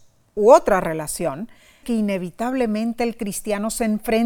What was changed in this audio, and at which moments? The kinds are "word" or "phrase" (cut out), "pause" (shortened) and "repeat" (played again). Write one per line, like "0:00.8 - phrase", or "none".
0:01.8 - word